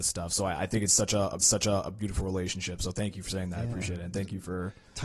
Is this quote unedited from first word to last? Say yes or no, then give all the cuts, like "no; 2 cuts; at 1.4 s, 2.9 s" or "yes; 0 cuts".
no; 1 cut; at 1.4 s